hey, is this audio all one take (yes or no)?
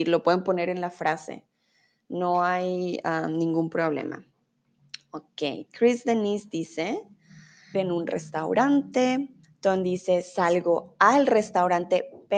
no